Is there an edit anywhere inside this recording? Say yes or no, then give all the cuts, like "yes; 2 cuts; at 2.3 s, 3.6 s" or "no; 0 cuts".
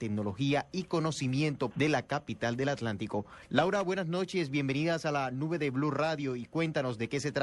yes; 1 cut; at 1.7 s